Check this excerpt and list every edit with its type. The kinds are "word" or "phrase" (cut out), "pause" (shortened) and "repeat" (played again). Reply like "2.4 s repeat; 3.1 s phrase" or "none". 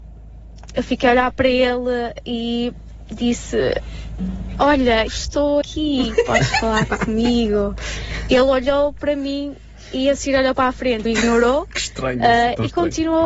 5.1 s word; 5.6 s word; 11.1 s word